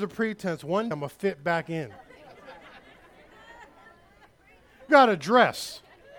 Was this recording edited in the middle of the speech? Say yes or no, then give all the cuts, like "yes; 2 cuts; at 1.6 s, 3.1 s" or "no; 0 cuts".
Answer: yes; 2 cuts; at 0.9 s, 4.9 s